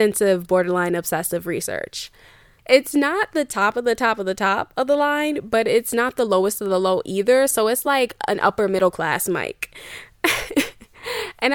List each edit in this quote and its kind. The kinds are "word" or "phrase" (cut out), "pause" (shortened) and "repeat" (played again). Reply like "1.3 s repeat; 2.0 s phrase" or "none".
none